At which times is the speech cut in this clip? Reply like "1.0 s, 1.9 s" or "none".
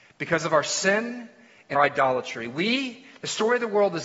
1.7 s